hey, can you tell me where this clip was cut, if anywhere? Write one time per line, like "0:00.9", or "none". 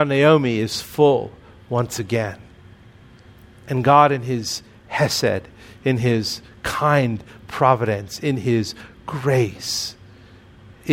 none